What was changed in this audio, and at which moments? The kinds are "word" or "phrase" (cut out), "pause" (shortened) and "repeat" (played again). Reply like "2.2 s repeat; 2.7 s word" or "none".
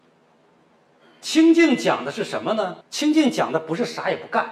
2.8 s pause